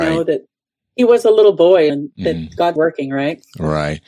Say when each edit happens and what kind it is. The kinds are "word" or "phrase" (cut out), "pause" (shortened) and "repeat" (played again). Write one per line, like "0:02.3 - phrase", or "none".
0:01.9 - phrase
0:02.8 - word